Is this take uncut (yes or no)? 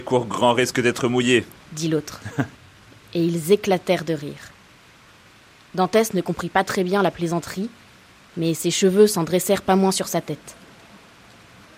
yes